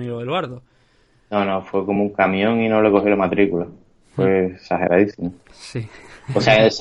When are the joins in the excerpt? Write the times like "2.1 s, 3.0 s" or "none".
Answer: none

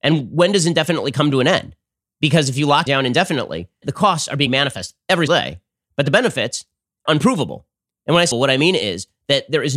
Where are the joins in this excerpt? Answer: 2.9 s, 3.8 s, 4.5 s, 5.3 s, 7.1 s, 8.3 s

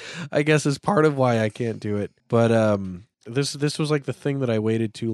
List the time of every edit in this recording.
2.2 s, 3.1 s

